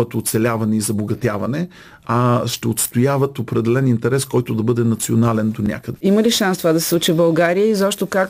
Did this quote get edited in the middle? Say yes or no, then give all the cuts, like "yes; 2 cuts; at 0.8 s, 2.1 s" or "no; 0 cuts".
no; 0 cuts